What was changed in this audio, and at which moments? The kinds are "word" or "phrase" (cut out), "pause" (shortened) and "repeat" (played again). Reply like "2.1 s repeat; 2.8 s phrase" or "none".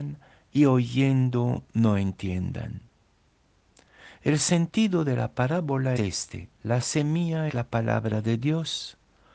6.0 s word; 6.6 s pause; 7.5 s word